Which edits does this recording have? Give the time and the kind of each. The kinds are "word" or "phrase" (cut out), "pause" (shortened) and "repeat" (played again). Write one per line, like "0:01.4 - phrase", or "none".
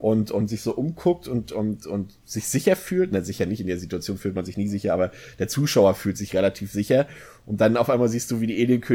none